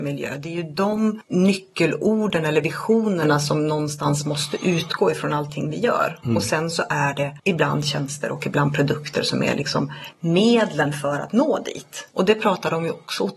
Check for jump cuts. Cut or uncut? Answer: uncut